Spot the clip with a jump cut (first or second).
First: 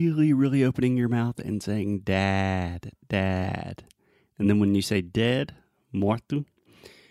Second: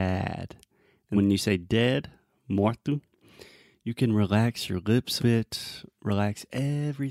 second